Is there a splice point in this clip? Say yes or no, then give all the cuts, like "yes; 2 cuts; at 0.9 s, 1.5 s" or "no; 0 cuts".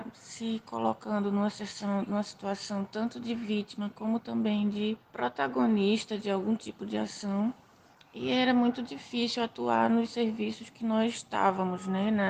yes; 2 cuts; at 5.0 s, 7.9 s